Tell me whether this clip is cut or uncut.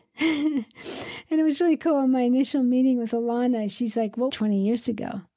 cut